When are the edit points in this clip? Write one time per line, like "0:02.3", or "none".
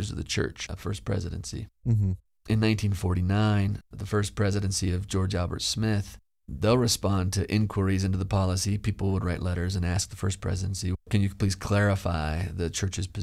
none